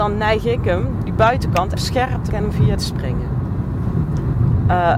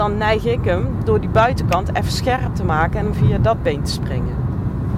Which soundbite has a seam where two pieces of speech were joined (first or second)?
first